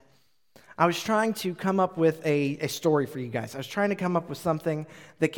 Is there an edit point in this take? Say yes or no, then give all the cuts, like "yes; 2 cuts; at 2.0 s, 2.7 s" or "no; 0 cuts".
no; 0 cuts